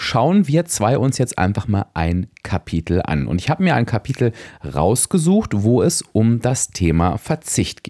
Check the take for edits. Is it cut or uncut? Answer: uncut